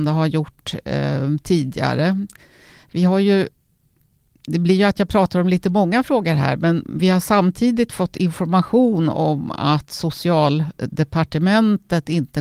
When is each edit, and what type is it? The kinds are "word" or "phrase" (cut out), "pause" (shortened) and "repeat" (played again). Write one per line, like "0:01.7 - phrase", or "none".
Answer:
none